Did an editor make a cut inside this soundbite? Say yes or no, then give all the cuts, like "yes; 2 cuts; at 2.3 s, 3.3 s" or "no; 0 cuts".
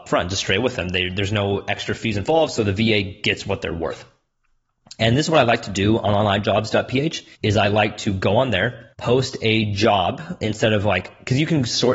yes; 2 cuts; at 7.3 s, 8.9 s